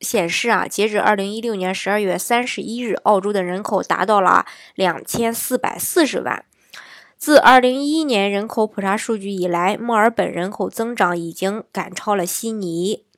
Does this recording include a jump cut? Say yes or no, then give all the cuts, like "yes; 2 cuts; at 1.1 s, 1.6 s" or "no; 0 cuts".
no; 0 cuts